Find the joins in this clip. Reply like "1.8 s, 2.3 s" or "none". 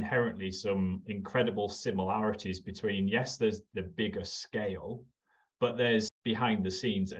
6.1 s